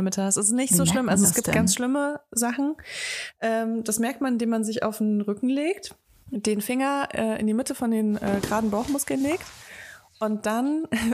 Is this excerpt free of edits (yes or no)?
yes